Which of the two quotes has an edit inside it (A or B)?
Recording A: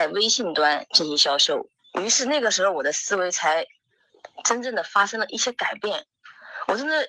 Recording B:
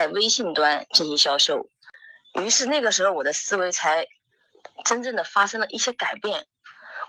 A